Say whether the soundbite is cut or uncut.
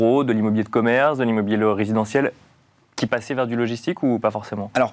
uncut